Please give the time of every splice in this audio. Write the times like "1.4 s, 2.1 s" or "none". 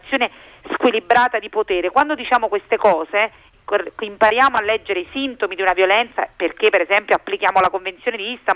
3.5 s